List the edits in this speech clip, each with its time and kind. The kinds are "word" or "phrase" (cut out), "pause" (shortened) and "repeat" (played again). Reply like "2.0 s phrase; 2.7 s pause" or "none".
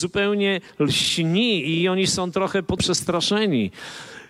2.8 s word